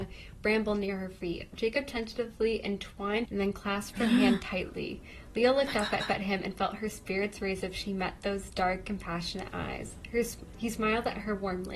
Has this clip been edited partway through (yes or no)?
yes